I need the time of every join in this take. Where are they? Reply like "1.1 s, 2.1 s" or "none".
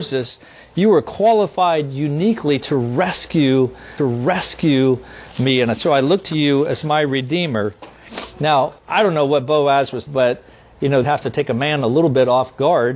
4.0 s, 8.8 s, 10.1 s, 11.0 s